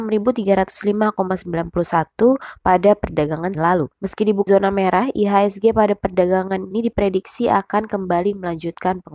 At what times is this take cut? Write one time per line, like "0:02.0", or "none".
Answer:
0:03.5
0:04.5
0:06.7